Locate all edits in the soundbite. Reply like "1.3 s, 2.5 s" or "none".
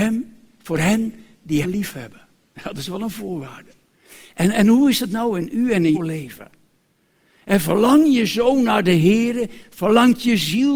1.6 s, 5.9 s